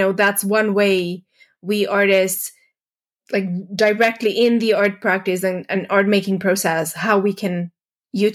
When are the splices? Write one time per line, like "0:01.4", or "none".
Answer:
none